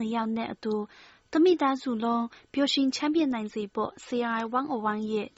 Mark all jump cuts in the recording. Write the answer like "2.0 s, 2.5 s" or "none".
none

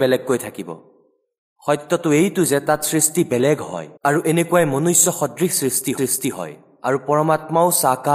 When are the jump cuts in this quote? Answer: 4.0 s, 6.0 s

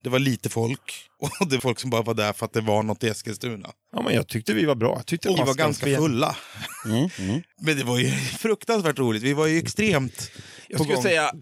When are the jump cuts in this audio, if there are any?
1.6 s, 5.4 s, 8.4 s

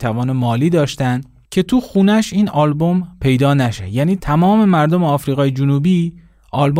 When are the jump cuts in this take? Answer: none

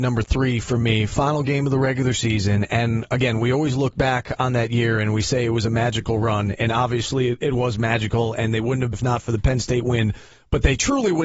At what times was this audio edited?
8.9 s

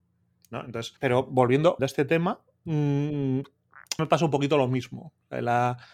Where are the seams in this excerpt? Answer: 1.0 s, 1.8 s, 4.0 s

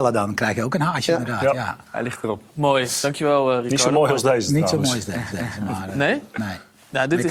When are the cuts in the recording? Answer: 1.8 s, 5.3 s

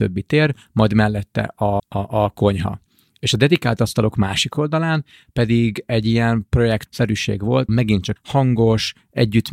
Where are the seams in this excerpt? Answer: 1.8 s, 6.9 s, 7.7 s, 8.2 s

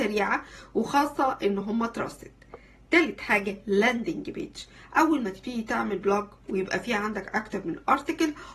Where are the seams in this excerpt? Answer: none

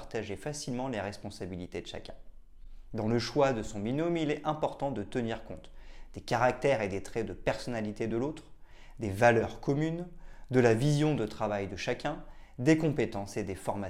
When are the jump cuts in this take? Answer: none

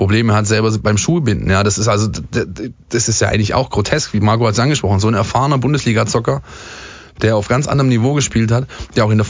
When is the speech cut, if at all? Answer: none

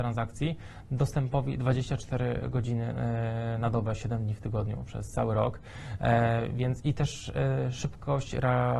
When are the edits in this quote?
none

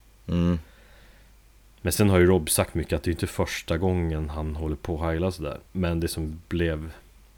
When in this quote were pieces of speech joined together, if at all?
5.7 s

